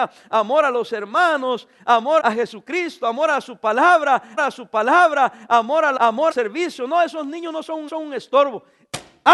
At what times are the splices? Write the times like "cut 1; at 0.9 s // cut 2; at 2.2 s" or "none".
cut 1; at 2.2 s // cut 2; at 4.4 s // cut 3; at 6.0 s // cut 4; at 6.3 s // cut 5; at 7.9 s